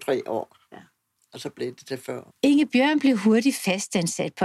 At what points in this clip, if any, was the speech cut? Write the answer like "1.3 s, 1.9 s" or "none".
2.3 s